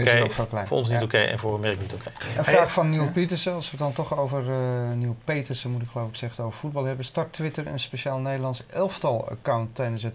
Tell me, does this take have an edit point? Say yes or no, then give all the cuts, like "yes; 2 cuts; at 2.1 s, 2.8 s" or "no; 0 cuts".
yes; 1 cut; at 6.3 s